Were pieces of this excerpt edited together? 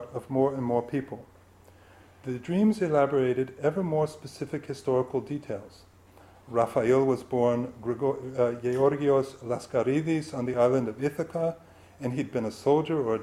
no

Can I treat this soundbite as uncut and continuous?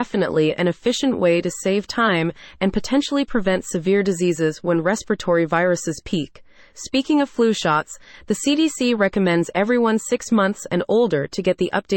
yes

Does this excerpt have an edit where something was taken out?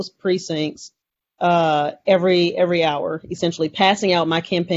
no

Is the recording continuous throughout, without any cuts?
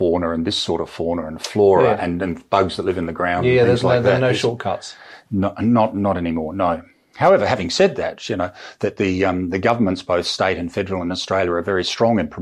yes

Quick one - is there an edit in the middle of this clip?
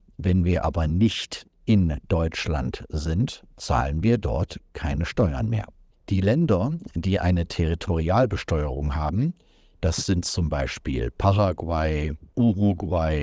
no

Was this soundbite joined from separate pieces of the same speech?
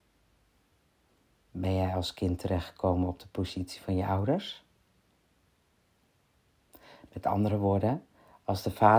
no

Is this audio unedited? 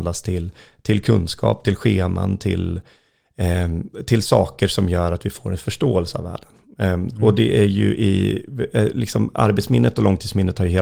yes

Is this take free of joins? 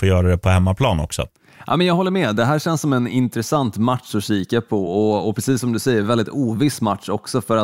yes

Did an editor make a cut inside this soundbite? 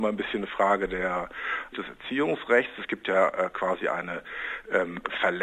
yes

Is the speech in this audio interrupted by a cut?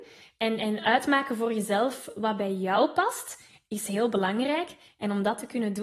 no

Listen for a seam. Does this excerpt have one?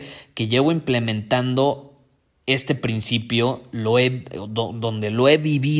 no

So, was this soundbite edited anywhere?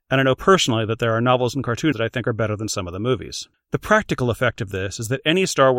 yes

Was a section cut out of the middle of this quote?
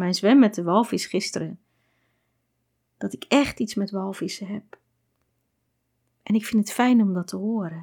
no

